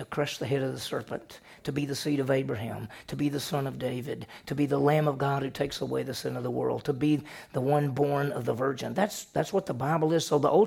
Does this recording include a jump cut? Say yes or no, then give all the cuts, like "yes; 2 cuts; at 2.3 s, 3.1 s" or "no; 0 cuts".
no; 0 cuts